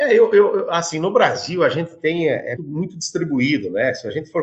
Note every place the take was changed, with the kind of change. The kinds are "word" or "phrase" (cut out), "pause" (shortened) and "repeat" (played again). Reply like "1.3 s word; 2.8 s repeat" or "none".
2.6 s word

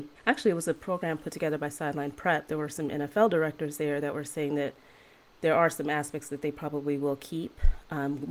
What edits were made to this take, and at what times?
none

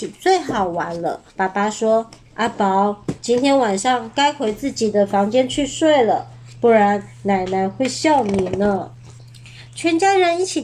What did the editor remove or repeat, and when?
1.3 s pause

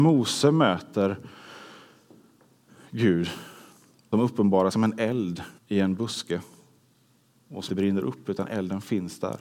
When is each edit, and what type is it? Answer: 4.1 s word; 4.7 s word; 5.6 s pause; 7.7 s word

